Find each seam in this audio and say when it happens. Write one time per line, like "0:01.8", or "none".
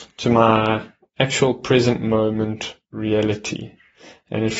none